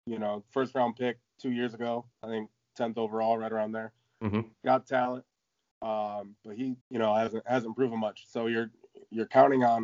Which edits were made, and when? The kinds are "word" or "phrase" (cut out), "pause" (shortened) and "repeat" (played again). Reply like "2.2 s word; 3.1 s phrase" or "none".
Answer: 2.1 s pause; 4.5 s pause; 6.4 s pause; 6.8 s pause